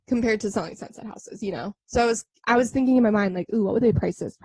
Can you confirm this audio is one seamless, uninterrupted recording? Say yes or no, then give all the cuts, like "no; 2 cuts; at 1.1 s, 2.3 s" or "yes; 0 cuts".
yes; 0 cuts